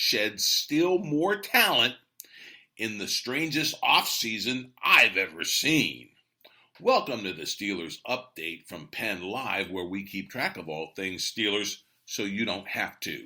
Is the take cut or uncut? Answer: uncut